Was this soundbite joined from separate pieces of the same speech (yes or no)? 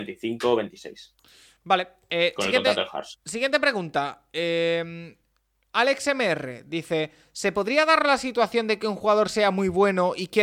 no